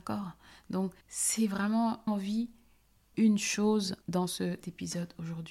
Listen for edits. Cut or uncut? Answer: cut